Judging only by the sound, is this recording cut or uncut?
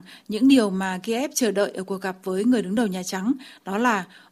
uncut